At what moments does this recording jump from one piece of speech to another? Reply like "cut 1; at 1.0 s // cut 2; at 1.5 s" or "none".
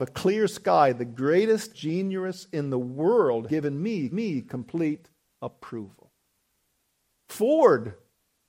cut 1; at 1.7 s // cut 2; at 3.5 s // cut 3; at 4.1 s